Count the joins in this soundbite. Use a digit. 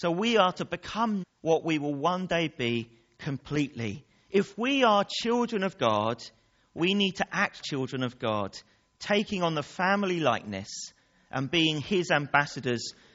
3